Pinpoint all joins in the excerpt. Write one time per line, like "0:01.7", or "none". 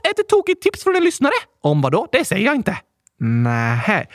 none